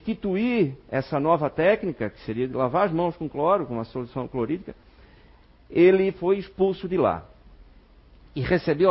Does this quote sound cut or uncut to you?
uncut